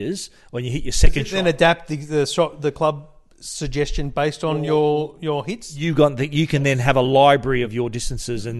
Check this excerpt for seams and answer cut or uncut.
uncut